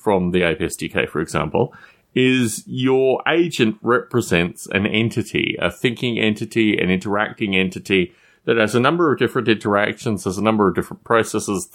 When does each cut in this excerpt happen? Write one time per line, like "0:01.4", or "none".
none